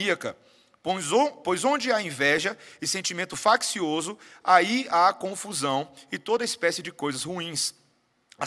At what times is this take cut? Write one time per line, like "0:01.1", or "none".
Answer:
none